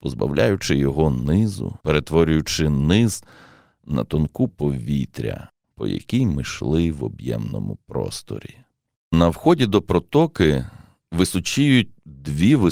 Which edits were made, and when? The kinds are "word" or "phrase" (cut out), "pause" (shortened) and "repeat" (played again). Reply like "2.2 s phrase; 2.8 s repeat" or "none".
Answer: 1.8 s pause; 4.5 s word